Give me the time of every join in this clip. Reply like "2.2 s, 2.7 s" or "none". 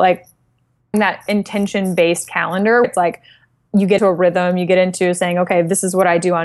0.9 s, 1.3 s, 2.8 s, 4.0 s